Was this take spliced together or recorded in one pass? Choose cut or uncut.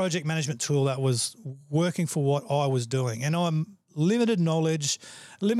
uncut